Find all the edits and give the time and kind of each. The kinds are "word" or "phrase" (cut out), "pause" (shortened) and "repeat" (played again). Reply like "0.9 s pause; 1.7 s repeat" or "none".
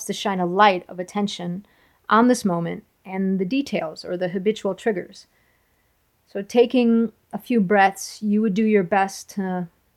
none